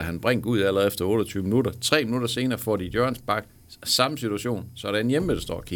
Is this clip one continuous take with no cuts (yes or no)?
yes